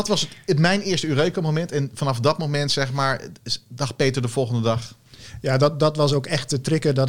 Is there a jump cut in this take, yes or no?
no